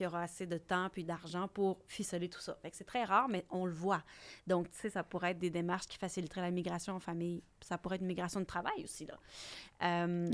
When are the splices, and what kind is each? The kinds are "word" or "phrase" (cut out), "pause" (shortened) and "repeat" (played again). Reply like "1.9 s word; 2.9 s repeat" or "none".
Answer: 7.5 s pause